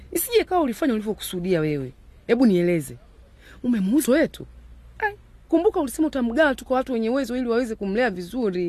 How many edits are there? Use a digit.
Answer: 1